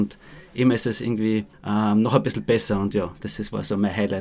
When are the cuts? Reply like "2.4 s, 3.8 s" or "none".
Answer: 1.5 s